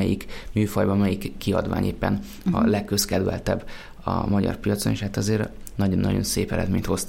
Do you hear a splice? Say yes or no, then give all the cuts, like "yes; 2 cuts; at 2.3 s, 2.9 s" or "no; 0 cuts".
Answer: no; 0 cuts